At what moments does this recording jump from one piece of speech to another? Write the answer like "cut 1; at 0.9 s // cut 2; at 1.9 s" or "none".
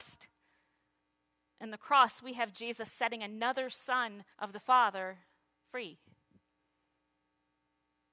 cut 1; at 4.3 s // cut 2; at 5.5 s